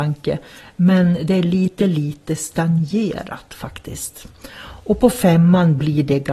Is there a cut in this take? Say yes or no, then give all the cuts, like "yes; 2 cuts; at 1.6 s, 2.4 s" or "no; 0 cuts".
no; 0 cuts